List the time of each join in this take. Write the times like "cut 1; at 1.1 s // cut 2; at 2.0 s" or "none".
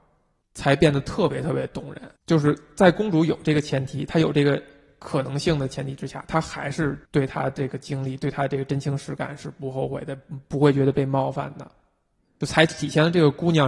cut 1; at 2.2 s // cut 2; at 7.1 s